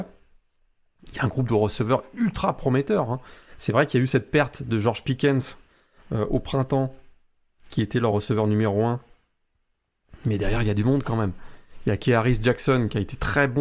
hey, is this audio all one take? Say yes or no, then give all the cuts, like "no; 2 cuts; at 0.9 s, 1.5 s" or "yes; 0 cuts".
yes; 0 cuts